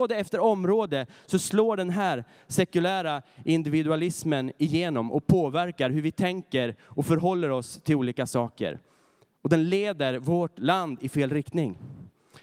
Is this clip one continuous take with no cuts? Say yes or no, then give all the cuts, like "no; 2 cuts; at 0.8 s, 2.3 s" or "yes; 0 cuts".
yes; 0 cuts